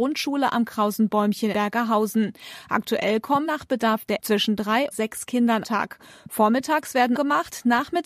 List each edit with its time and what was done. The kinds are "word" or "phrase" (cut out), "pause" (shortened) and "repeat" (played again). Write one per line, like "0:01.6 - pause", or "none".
0:01.5 - word
0:03.5 - word
0:04.2 - word
0:04.9 - word
0:05.6 - word
0:07.2 - word